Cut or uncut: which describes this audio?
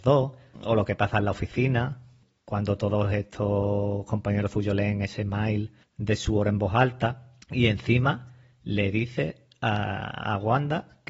uncut